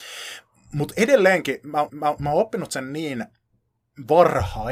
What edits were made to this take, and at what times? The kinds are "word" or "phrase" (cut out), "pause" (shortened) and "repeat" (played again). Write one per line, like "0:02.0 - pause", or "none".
0:01.9 - repeat

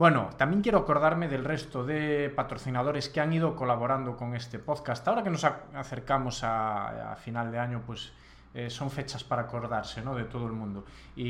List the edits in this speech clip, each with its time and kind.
none

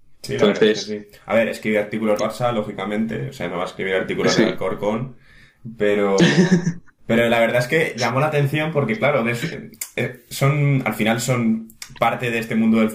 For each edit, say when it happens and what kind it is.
0:02.2 - word
0:07.0 - pause

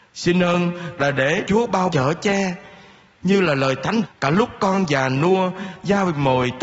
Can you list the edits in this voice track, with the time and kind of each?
0:01.0 - word
0:01.4 - word
0:01.9 - word
0:04.0 - phrase

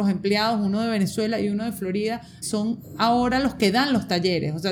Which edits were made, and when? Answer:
0:02.4 - word

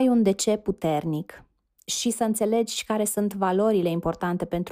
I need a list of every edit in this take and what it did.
none

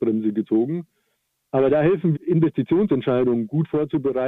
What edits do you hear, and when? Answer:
0:02.1 - word

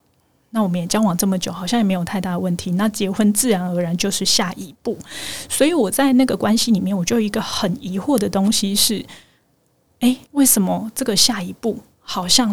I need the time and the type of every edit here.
0:10.2 - pause

